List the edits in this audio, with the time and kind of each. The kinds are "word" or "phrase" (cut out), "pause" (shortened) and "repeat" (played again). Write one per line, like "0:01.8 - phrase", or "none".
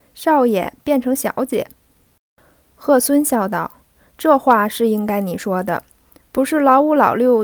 0:03.8 - pause